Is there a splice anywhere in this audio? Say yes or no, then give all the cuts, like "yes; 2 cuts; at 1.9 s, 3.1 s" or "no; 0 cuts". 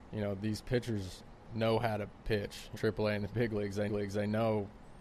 yes; 2 cuts; at 2.7 s, 3.9 s